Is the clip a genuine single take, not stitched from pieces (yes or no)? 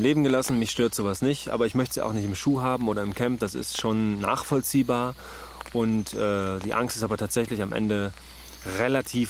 yes